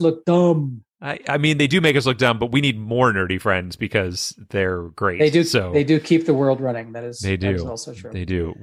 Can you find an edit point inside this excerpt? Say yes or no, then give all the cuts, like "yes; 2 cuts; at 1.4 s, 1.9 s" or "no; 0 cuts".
no; 0 cuts